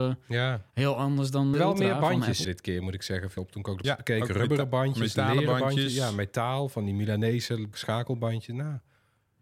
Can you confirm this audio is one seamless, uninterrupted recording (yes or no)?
no